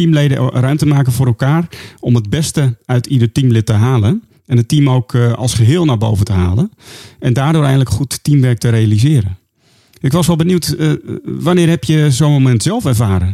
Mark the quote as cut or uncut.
uncut